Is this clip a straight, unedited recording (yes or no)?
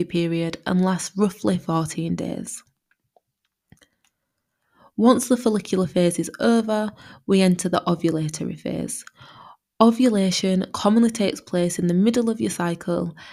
yes